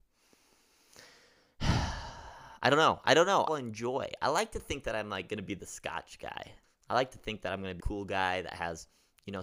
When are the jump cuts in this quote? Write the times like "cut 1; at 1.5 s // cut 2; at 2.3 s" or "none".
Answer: cut 1; at 3.5 s // cut 2; at 6.6 s // cut 3; at 7.8 s